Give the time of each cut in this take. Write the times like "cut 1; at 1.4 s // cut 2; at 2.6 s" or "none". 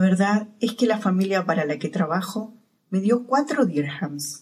none